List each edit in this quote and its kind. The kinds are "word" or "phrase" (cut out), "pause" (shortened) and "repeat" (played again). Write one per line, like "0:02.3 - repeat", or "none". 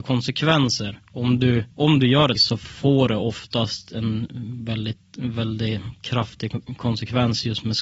0:01.7 - pause
0:02.4 - word